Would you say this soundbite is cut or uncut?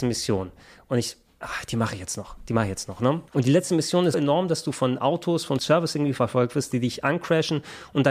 cut